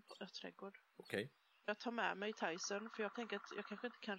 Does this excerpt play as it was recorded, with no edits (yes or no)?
yes